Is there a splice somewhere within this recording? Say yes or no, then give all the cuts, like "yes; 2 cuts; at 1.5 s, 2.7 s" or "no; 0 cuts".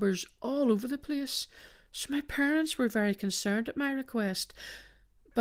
no; 0 cuts